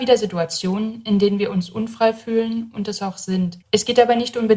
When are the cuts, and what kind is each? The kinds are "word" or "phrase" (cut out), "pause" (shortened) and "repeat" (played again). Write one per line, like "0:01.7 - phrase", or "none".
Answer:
0:03.6 - pause